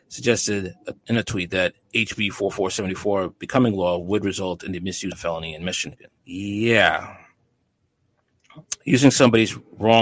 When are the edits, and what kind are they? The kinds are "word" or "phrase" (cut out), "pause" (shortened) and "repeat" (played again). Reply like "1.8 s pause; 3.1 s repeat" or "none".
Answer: 1.0 s pause; 5.1 s phrase; 6.2 s pause

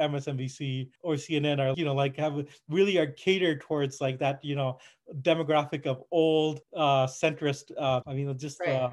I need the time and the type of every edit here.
1.0 s pause; 1.7 s word; 6.6 s pause; 8.0 s word

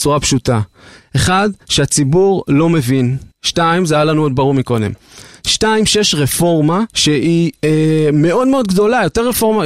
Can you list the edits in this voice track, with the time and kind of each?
1.6 s pause; 3.3 s pause; 6.9 s pause

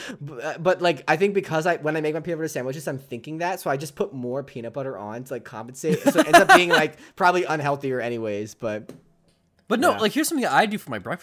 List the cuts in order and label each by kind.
none

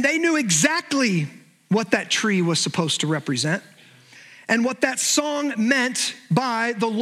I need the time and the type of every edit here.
none

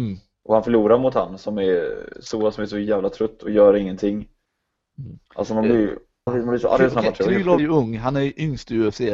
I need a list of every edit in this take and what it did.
5.3 s pause; 6.3 s word; 7.6 s word

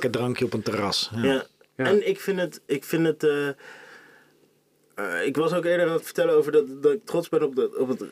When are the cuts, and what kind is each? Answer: none

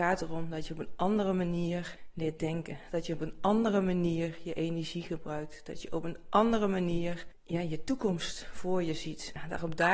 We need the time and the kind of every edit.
none

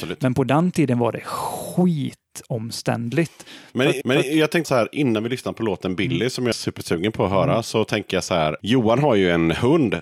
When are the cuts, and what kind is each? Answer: 4.0 s repeat; 4.6 s word; 6.5 s word

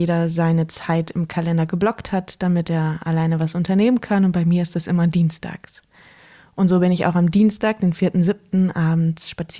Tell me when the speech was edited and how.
none

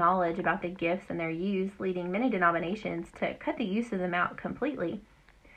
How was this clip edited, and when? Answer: none

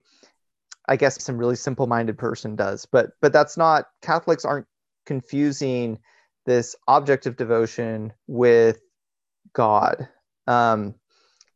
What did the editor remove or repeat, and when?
1.2 s word; 8.2 s pause

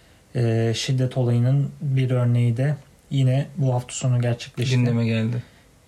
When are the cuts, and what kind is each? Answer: none

